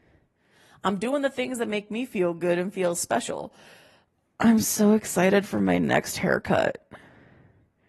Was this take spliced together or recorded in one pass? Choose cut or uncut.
uncut